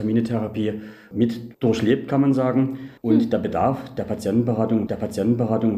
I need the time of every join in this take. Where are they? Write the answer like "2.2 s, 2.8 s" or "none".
1.5 s, 3.0 s, 4.9 s

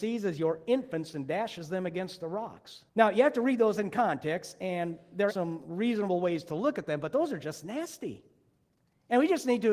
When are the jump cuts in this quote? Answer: 2.9 s, 5.3 s

